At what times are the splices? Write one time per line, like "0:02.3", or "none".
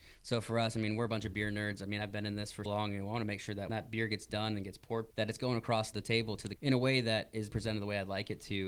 0:02.7
0:03.7
0:05.1
0:05.9
0:06.6
0:07.5

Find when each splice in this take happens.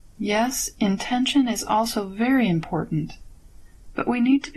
none

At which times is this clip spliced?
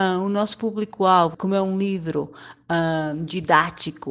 0:01.3

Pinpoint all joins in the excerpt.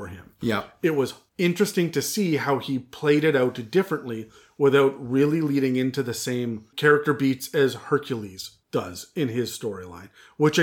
none

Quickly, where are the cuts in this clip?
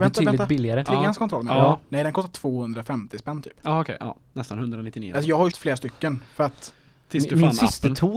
0:05.5

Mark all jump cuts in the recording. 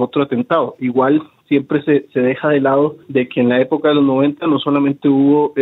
0:03.0

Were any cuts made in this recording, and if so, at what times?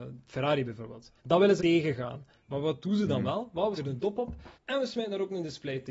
0:01.2
0:01.6
0:03.8
0:04.5

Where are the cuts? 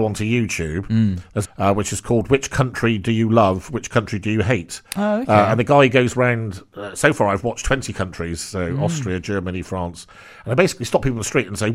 0:01.4

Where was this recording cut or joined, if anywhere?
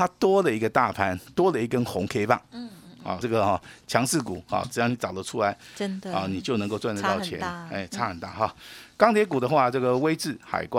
0:03.2

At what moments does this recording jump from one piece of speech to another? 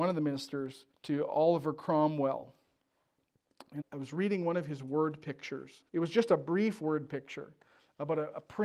0:00.9
0:03.8
0:05.9

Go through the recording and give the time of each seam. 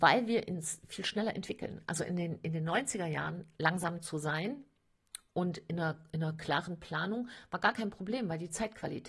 none

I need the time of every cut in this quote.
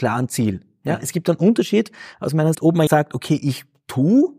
0:02.5
0:02.9

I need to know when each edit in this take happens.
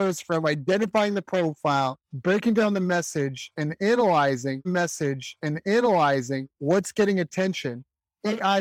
0:02.0
0:04.6

